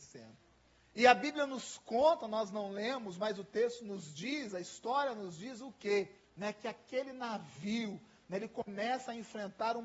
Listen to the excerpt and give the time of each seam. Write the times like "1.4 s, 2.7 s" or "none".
6.2 s